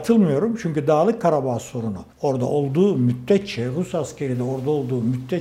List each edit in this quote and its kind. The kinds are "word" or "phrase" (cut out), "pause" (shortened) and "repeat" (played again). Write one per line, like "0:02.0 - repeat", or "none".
0:02.1 - pause